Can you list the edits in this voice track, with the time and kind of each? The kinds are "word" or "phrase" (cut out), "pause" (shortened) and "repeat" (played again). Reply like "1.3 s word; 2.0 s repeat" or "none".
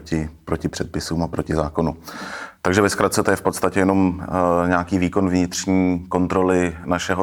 none